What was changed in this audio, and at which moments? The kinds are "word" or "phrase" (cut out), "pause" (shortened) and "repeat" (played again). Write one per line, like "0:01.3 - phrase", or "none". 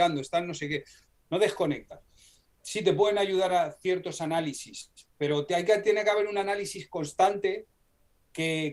0:02.6 - word